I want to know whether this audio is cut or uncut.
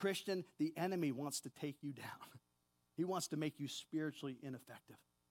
uncut